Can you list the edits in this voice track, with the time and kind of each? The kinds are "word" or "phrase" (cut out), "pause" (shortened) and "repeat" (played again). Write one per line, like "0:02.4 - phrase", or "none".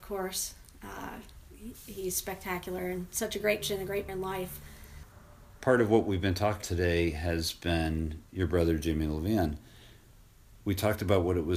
0:03.6 - word
0:04.1 - word
0:06.6 - word